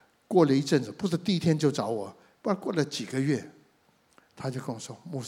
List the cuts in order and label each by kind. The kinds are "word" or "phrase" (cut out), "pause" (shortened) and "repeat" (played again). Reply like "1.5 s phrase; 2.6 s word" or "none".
4.3 s pause